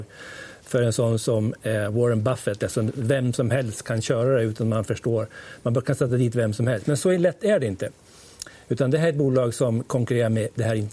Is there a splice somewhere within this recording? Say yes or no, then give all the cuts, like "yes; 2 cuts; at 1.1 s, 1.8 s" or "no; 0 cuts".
no; 0 cuts